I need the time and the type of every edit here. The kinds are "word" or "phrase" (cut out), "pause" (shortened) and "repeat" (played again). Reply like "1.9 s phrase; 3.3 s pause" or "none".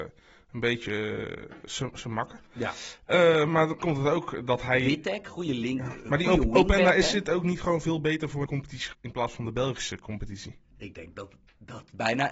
3.8 s word; 8.5 s word; 8.9 s word